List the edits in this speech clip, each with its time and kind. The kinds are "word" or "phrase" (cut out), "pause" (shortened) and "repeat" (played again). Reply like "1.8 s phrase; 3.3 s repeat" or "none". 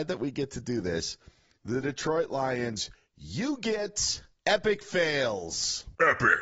none